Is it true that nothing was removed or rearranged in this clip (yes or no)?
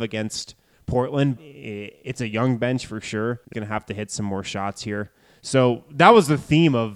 no